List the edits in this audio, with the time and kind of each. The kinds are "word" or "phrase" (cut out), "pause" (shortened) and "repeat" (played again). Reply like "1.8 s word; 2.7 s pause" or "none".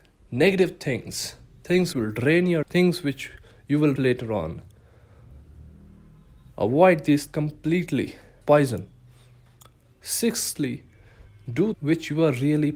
1.9 s word; 2.6 s word; 4.0 s word; 7.3 s word; 8.4 s word; 11.7 s word

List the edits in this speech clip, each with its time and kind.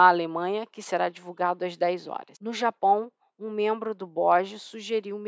none

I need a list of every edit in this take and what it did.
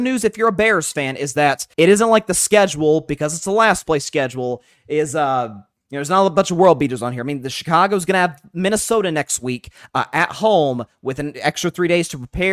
1.7 s pause

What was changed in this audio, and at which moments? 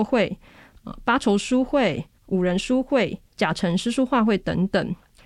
2.1 s pause; 3.3 s pause

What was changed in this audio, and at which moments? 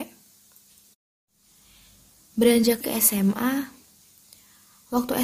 2.8 s word

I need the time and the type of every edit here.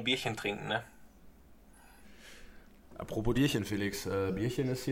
3.3 s word

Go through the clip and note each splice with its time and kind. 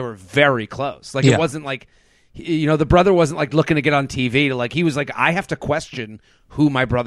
none

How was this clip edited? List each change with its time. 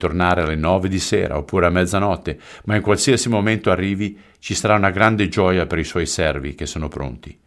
none

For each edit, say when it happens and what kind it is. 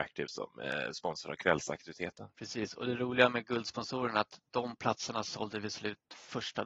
2.3 s pause

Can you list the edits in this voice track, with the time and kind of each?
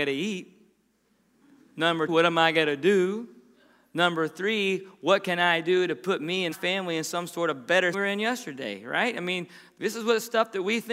2.1 s word; 6.5 s word; 7.9 s phrase

